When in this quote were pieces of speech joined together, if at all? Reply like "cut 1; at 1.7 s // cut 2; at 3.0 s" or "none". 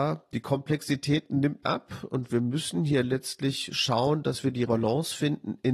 cut 1; at 1.6 s // cut 2; at 4.7 s